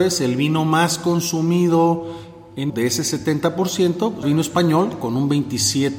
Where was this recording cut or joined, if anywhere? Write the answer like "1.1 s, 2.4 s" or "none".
2.7 s, 4.2 s